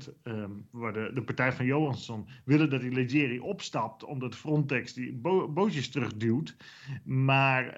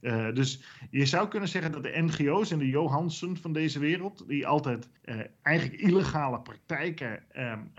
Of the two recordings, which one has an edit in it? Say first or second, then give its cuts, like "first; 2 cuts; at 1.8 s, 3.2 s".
second; 1 cut; at 5.0 s